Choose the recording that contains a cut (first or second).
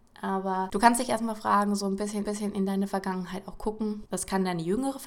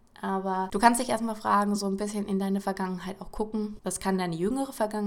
first